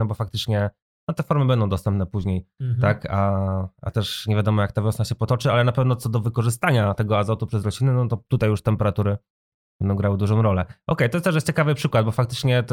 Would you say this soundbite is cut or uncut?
uncut